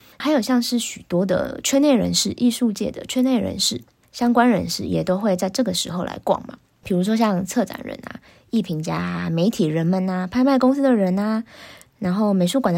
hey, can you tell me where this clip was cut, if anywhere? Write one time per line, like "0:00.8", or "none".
none